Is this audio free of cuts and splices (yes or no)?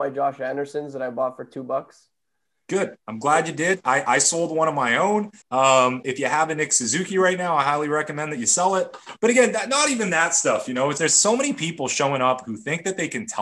no